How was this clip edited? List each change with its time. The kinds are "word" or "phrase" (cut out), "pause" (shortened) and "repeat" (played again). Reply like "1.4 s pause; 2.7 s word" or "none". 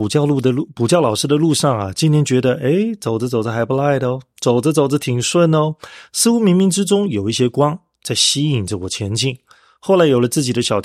none